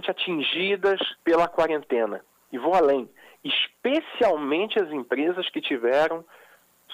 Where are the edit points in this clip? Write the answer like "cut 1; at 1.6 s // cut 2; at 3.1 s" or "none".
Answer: cut 1; at 1.2 s

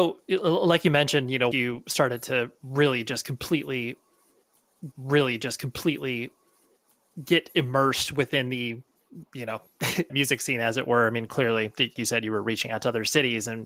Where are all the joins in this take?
cut 1; at 1.5 s // cut 2; at 4.9 s // cut 3; at 10.1 s // cut 4; at 12.0 s

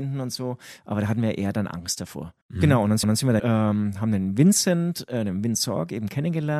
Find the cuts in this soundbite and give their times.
cut 1; at 2.4 s // cut 2; at 3.0 s // cut 3; at 3.4 s

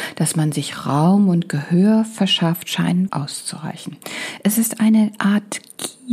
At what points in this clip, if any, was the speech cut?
cut 1; at 3.1 s

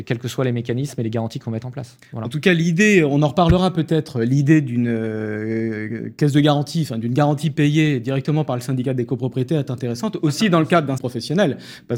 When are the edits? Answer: cut 1; at 11.0 s

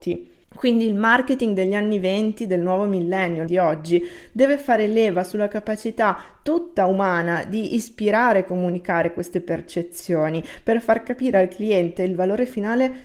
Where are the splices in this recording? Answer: cut 1; at 3.5 s

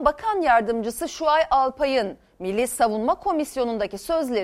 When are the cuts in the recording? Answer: none

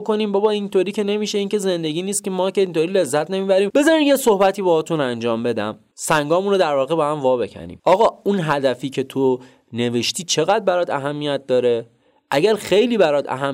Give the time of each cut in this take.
none

